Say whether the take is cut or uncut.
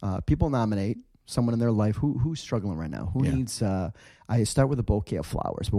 uncut